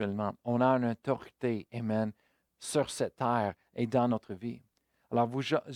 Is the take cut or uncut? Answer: uncut